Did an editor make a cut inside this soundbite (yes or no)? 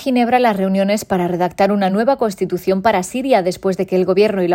no